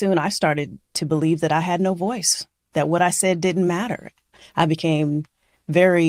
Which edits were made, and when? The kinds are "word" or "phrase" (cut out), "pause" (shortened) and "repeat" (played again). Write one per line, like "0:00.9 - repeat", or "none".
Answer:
none